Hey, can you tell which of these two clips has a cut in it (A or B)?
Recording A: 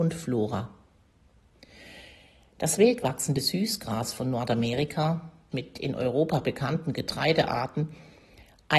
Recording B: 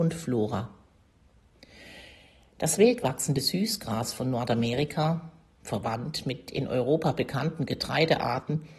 A